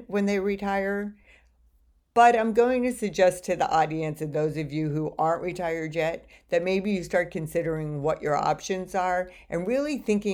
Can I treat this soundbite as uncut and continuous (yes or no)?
yes